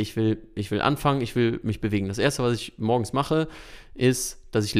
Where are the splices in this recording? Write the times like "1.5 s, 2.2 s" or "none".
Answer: none

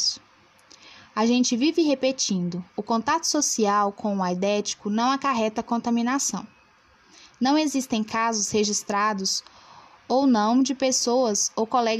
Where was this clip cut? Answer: 2.7 s

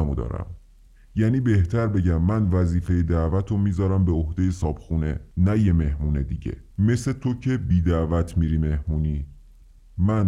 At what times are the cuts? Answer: 5.3 s, 6.7 s

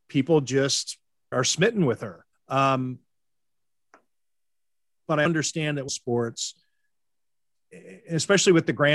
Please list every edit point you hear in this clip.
1.3 s, 2.3 s, 5.3 s, 5.9 s

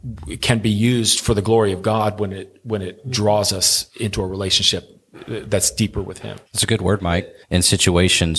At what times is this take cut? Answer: 6.5 s, 7.4 s

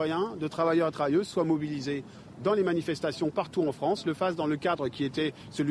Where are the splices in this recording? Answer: none

